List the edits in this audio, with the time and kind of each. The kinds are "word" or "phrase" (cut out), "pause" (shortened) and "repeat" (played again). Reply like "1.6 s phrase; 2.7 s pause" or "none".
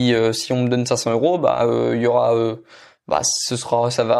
none